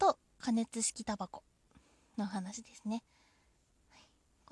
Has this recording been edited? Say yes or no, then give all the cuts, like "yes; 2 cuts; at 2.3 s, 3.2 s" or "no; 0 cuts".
no; 0 cuts